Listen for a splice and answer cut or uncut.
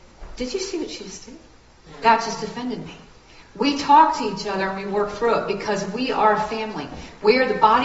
uncut